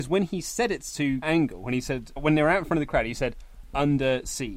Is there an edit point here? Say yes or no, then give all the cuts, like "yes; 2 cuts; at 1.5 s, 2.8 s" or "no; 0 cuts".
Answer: yes; 2 cuts; at 1.2 s, 2.2 s